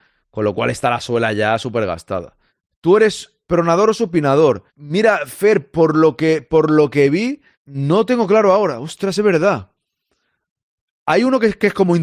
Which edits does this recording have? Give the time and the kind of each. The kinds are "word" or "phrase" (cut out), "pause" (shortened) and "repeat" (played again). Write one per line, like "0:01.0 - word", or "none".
0:02.5 - pause
0:03.4 - pause
0:04.7 - pause
0:07.5 - pause